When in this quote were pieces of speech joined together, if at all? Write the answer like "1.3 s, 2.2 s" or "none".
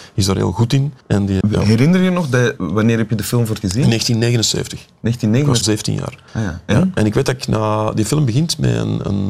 1.0 s, 1.4 s, 2.6 s, 3.6 s, 5.6 s, 6.3 s